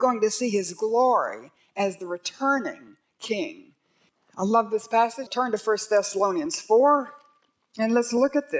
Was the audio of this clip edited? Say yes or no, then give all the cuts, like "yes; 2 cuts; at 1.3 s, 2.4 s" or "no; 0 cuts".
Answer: yes; 1 cut; at 5.3 s